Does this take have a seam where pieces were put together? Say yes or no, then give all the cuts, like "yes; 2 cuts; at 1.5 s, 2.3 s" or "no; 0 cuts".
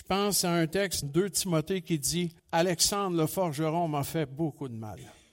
yes; 2 cuts; at 1.0 s, 2.4 s